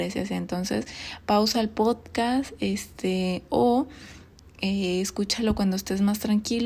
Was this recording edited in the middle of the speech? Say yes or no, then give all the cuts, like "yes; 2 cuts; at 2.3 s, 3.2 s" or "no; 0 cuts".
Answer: no; 0 cuts